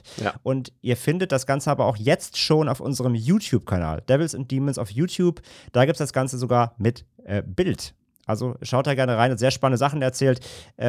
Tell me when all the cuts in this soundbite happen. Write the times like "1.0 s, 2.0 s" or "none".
none